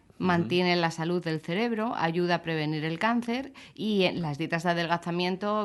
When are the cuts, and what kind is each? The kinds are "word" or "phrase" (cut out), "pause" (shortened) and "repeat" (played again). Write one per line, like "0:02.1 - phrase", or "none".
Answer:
none